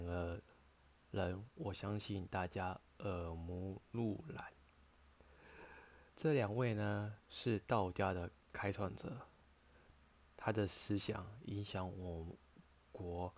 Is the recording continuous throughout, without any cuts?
no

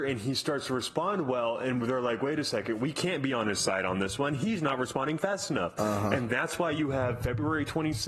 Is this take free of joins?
yes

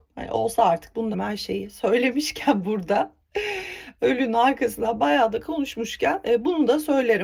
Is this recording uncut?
no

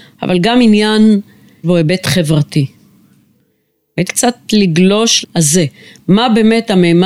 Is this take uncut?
no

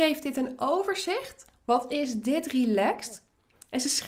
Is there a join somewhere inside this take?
no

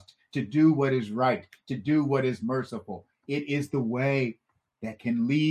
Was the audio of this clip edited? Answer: no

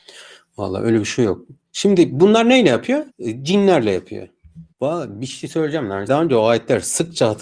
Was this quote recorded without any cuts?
no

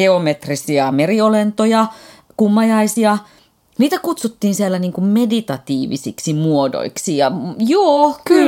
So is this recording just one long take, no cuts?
yes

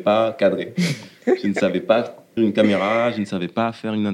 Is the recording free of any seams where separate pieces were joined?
no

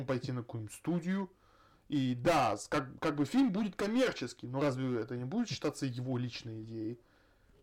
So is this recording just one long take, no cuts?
yes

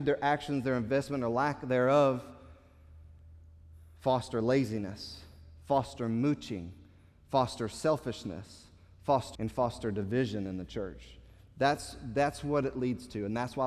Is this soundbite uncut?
no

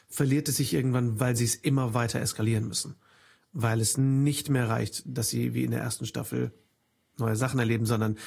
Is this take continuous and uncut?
yes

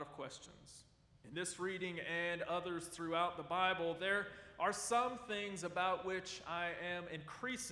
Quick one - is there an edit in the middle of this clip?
no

